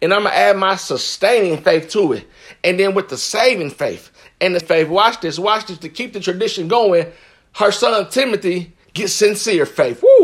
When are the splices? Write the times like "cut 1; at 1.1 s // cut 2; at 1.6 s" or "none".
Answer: cut 1; at 4.6 s